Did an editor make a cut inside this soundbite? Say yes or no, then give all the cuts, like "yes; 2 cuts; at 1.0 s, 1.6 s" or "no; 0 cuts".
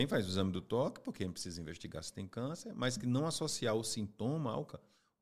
no; 0 cuts